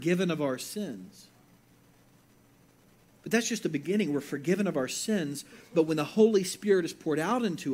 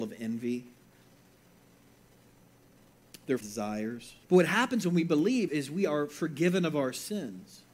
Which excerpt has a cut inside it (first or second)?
second